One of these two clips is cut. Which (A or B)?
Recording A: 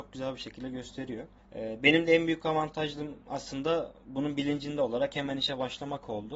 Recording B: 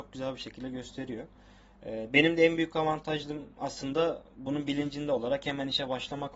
A